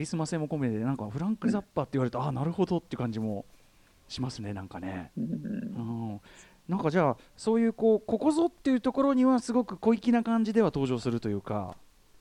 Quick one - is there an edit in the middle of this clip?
no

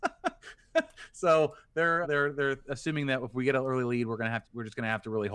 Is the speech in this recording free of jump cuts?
no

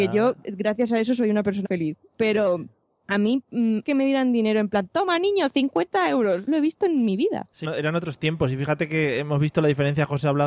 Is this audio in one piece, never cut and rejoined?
no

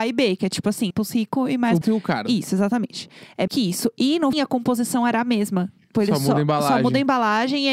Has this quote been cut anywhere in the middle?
yes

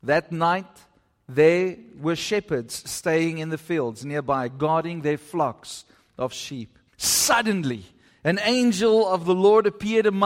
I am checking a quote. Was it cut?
yes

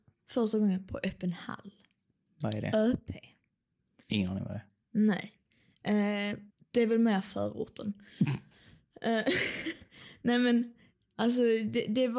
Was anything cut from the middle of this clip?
yes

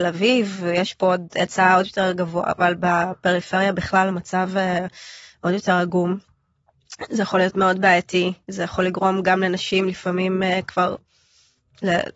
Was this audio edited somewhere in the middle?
no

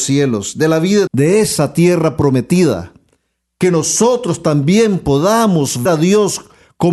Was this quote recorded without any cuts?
no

